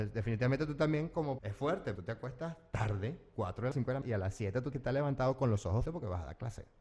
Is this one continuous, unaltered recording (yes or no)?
no